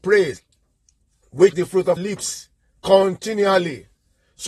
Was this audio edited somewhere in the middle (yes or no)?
yes